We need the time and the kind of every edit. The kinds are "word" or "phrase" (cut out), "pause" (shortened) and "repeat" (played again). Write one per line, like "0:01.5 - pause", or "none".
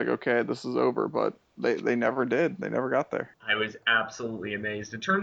0:03.3 - pause